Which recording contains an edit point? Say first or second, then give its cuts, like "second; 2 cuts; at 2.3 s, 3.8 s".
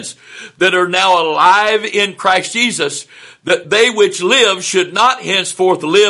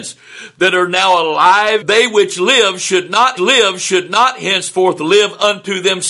second; 2 cuts; at 1.8 s, 3.4 s